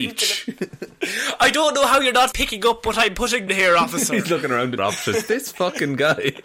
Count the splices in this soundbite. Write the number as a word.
three